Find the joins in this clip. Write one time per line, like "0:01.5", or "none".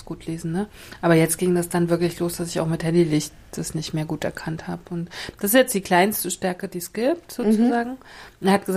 none